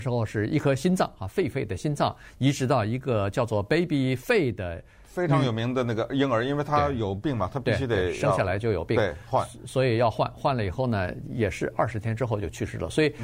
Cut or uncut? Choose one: uncut